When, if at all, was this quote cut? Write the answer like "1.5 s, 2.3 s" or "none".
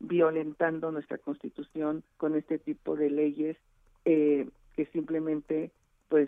2.0 s